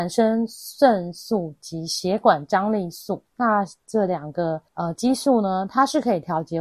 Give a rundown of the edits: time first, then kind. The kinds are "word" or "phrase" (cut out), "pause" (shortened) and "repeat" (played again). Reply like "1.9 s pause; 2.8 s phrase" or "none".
3.3 s pause; 4.7 s pause